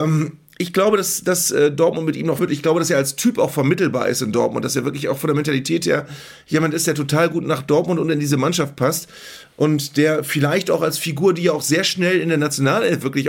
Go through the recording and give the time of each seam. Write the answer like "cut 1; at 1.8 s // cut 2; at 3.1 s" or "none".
cut 1; at 2.4 s